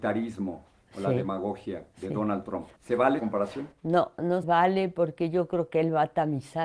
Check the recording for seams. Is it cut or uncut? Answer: cut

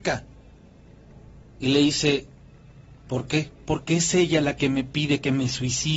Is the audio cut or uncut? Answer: cut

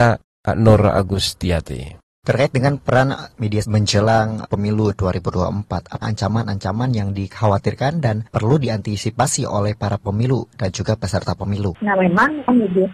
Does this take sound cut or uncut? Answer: cut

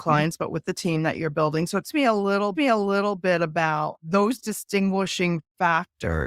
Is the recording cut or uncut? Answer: cut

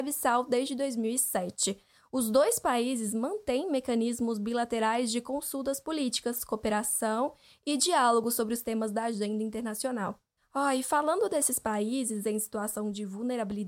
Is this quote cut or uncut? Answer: uncut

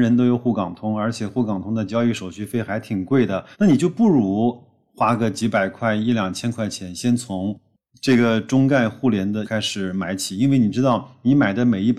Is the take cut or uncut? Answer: cut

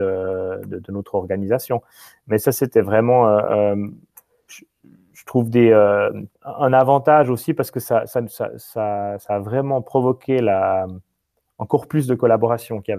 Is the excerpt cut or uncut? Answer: cut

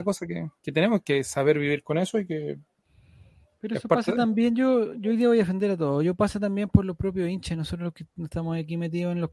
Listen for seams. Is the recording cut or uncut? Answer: uncut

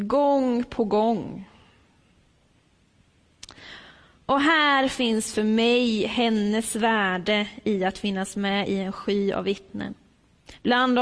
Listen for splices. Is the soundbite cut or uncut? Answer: uncut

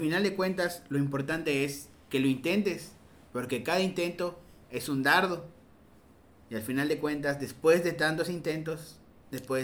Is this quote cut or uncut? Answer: uncut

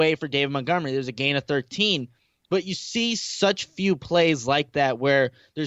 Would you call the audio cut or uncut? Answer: uncut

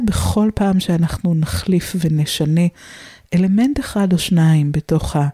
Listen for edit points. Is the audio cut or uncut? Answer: uncut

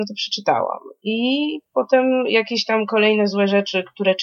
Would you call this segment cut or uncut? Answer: uncut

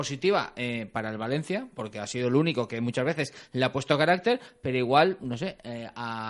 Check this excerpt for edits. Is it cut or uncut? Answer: uncut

